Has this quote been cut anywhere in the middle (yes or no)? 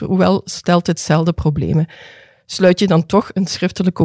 no